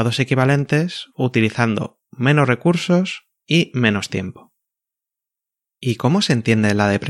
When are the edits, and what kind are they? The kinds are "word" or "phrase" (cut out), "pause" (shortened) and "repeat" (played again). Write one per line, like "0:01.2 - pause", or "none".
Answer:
none